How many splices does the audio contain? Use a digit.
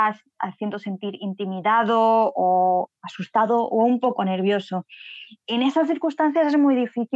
0